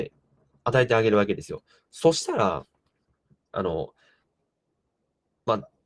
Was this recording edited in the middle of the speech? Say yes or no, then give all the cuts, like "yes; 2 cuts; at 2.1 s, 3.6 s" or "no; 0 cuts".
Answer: yes; 1 cut; at 3.0 s